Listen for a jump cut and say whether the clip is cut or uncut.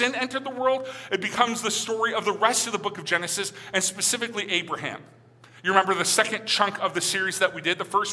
uncut